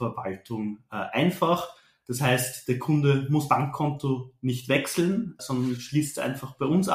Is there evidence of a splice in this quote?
yes; 2 cuts; at 3.5 s, 5.4 s

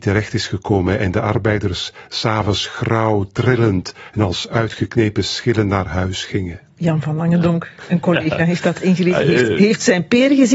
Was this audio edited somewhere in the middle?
no; 0 cuts

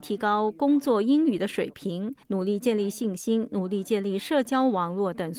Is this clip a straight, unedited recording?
no; 1 cut; at 2.2 s

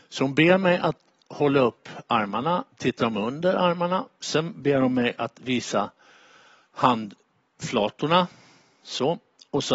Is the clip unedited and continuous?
no; 1 cut; at 2.7 s

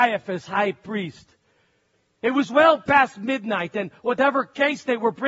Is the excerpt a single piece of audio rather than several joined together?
yes; 0 cuts

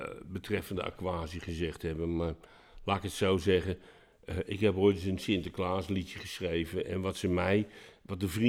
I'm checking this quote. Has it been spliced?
no; 0 cuts

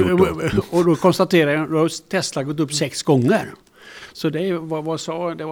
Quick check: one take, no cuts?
yes; 0 cuts

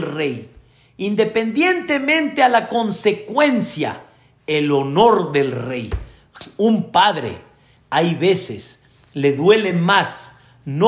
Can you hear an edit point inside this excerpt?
no; 0 cuts

